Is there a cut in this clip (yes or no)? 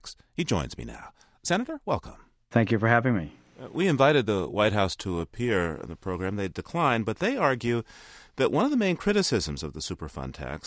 no